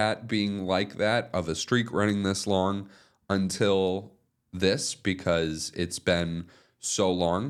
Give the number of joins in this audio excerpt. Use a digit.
0